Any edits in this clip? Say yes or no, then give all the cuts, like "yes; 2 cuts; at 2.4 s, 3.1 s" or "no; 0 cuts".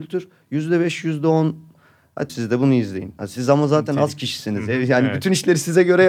yes; 1 cut; at 2.3 s